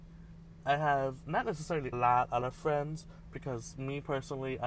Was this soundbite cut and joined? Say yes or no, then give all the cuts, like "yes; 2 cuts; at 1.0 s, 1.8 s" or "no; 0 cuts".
yes; 2 cuts; at 1.9 s, 2.4 s